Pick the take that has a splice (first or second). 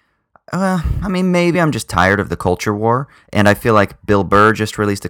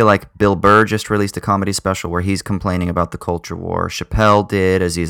first